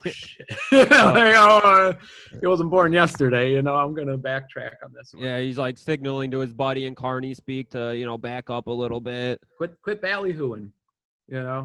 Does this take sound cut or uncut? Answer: cut